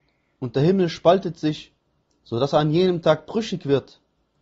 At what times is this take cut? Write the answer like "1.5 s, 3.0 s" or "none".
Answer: none

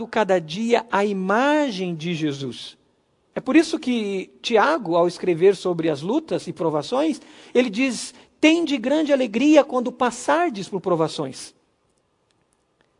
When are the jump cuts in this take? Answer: none

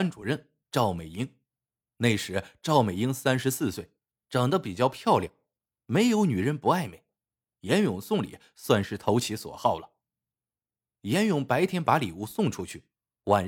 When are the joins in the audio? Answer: none

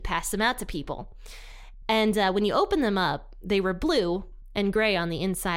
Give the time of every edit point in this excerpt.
none

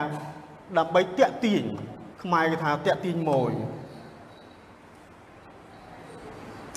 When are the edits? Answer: 2.1 s

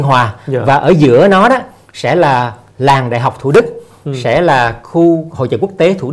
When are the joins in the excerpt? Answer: none

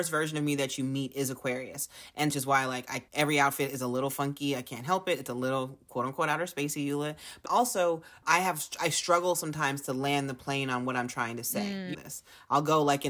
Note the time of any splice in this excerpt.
2.3 s, 3.1 s, 7.5 s, 8.2 s, 11.9 s

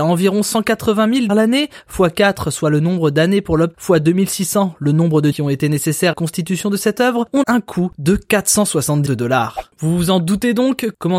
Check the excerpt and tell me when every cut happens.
1.3 s, 3.7 s, 5.3 s, 6.1 s, 7.4 s, 9.1 s

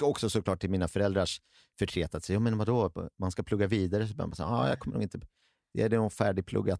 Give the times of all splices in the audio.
none

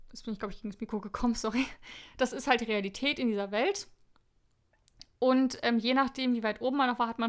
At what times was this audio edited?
none

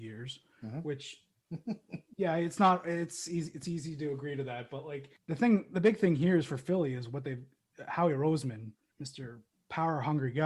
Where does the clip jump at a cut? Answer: none

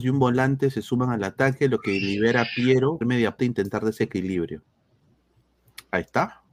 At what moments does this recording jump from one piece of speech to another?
3.0 s, 3.4 s

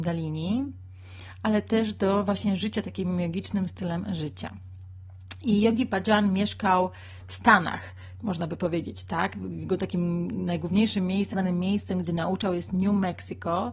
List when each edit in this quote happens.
11.3 s

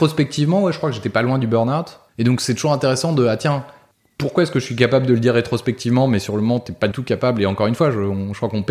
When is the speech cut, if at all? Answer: 2.1 s, 3.9 s, 6.9 s

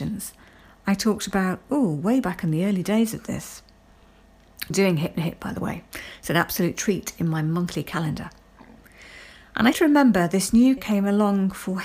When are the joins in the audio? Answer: 4.7 s, 9.7 s, 10.8 s

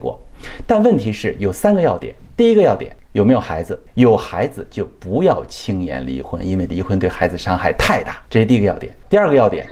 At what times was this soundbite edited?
8.2 s

